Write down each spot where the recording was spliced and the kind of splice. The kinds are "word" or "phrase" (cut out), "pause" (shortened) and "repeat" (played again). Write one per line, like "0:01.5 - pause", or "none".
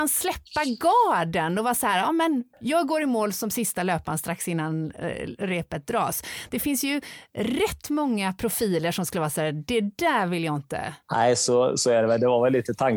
0:02.5 - pause
0:11.0 - pause